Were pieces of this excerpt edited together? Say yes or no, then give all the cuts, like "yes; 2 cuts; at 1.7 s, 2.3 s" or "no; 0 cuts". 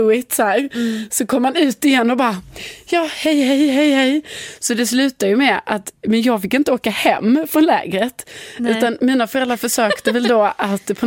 no; 0 cuts